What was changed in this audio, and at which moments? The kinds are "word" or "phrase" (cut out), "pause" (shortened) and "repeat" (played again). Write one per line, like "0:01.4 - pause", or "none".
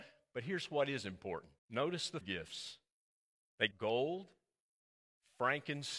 0:01.6 - pause
0:02.2 - word
0:03.7 - phrase